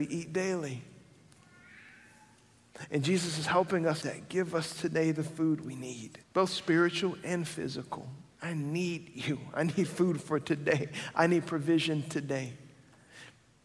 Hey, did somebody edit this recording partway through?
yes; 3 cuts; at 4.0 s, 6.2 s, 8.3 s

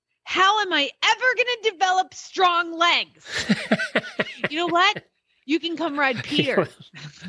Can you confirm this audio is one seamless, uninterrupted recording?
yes; 0 cuts

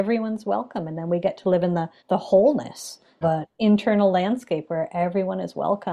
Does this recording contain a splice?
yes; 2 cuts; at 2.0 s, 3.2 s

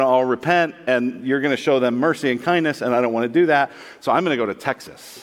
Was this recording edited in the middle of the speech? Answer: no; 0 cuts

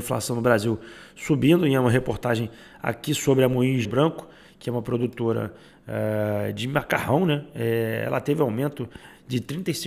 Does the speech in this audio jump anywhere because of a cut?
yes; 1 cut; at 3.8 s

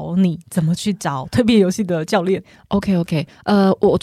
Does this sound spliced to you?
no; 0 cuts

